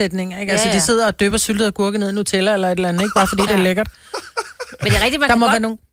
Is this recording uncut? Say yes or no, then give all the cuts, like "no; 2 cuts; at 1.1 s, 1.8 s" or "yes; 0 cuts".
yes; 0 cuts